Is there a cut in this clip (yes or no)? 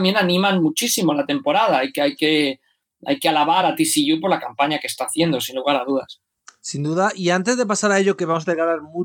no